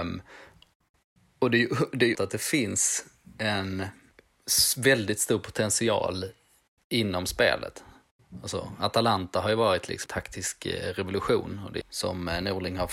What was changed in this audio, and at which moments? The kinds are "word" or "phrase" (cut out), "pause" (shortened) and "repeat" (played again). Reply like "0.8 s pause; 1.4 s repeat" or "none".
2.1 s word; 10.1 s word; 11.8 s phrase